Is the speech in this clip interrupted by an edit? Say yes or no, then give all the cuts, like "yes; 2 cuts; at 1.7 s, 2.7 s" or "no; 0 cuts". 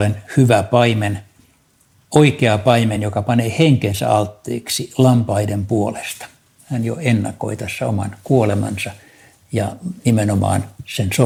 no; 0 cuts